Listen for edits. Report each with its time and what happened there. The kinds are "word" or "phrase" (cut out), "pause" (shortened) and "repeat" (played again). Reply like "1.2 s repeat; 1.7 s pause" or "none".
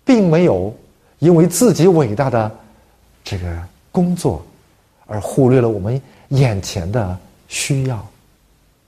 none